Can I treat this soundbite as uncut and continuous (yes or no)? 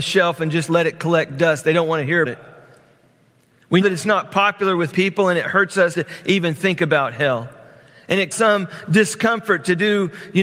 no